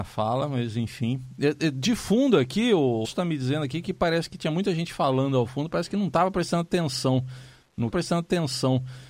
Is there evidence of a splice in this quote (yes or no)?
yes